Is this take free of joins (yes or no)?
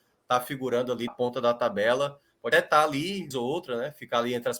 no